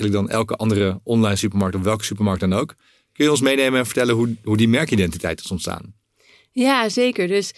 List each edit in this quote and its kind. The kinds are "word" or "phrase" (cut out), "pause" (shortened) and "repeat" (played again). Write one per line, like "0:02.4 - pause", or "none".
none